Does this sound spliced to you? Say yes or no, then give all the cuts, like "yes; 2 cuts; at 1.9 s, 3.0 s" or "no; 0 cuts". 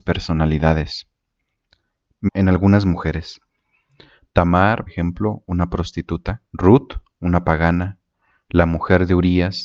yes; 3 cuts; at 2.3 s, 4.9 s, 6.5 s